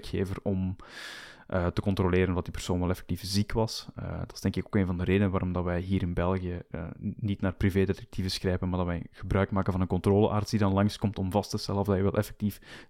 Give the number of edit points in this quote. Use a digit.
0